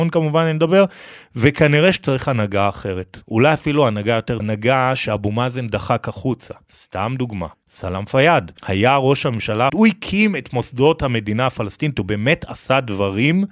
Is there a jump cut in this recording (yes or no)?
yes